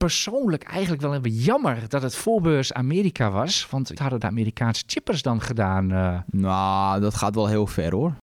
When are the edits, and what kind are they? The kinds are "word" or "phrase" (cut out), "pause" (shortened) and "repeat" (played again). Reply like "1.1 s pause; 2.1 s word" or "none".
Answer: 4.0 s phrase